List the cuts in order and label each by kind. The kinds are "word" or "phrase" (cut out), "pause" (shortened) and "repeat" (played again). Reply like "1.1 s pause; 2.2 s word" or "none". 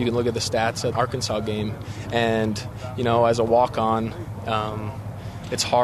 0.9 s word